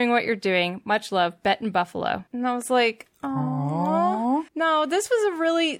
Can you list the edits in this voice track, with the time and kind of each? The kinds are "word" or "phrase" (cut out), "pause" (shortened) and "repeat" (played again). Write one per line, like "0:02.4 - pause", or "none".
0:02.3 - pause
0:04.5 - pause